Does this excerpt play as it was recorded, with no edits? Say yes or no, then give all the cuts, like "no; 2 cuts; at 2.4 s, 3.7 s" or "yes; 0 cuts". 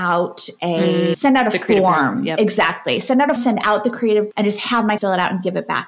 no; 4 cuts; at 1.1 s, 3.4 s, 4.3 s, 5.0 s